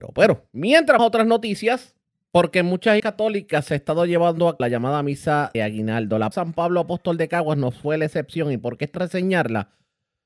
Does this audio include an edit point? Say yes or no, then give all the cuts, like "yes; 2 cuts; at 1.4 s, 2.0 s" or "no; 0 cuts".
yes; 7 cuts; at 1.0 s, 2.0 s, 3.0 s, 4.6 s, 5.5 s, 6.3 s, 8.9 s